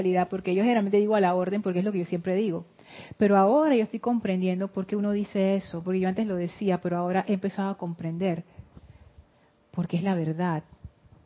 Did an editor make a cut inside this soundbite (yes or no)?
no